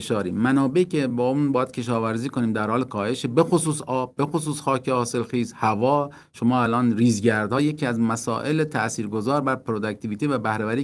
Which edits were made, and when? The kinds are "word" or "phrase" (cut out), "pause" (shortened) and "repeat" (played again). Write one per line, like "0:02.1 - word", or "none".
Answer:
none